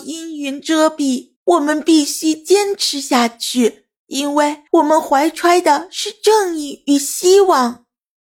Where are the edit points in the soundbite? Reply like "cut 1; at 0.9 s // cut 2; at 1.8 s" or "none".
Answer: cut 1; at 1.4 s // cut 2; at 4.0 s // cut 3; at 4.7 s